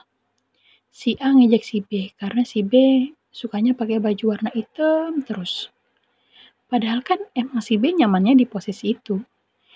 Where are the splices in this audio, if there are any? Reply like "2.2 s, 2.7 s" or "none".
none